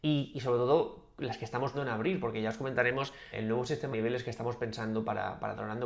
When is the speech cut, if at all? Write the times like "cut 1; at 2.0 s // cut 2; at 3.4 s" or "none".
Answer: cut 1; at 1.7 s // cut 2; at 3.3 s // cut 3; at 3.9 s